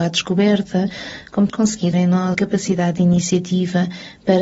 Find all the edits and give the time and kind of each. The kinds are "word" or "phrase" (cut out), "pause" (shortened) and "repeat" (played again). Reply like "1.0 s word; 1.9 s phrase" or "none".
1.5 s word; 1.9 s word; 2.3 s word